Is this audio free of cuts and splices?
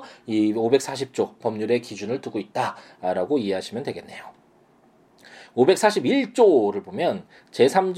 yes; 0 cuts

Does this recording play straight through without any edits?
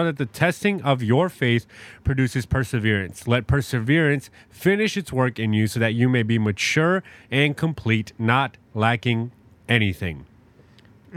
yes; 0 cuts

